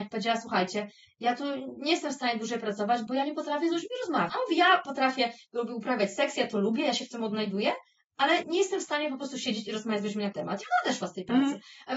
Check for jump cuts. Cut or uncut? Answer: cut